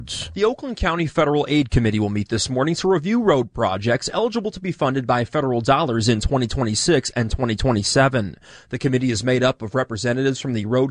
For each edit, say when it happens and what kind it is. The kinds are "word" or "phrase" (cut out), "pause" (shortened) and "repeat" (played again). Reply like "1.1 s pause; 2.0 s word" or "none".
none